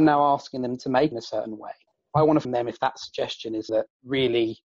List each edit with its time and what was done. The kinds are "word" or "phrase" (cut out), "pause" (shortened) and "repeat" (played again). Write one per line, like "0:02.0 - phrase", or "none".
0:01.1 - phrase
0:01.9 - pause
0:02.4 - phrase
0:03.7 - word

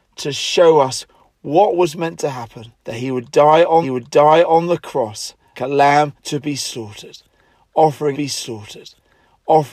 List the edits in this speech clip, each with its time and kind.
0:02.8 - pause
0:03.8 - repeat
0:05.5 - word
0:06.2 - pause
0:08.1 - repeat

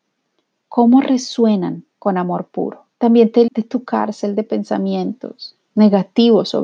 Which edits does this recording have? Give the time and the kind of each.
0:02.9 - pause
0:03.5 - word

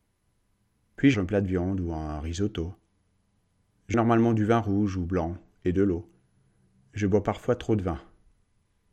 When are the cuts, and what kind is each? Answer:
0:01.1 - word
0:03.9 - word

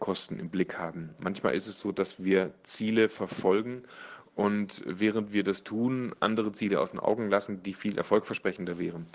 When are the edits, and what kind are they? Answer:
none

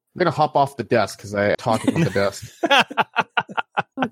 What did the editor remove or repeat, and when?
0:01.5 - phrase
0:02.0 - phrase

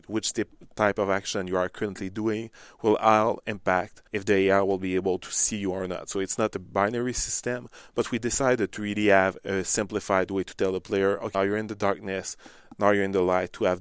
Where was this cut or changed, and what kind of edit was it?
0:04.1 - pause
0:11.3 - word

